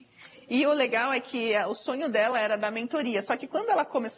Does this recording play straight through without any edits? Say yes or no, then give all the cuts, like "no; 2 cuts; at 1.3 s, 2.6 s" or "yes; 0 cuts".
yes; 0 cuts